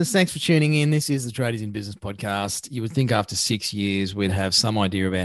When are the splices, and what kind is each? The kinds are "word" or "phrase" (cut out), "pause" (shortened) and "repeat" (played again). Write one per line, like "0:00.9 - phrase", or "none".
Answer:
none